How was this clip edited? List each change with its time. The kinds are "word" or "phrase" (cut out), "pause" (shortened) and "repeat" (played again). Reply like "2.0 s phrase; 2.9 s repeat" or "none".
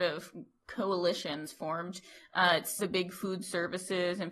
1.4 s word; 2.8 s word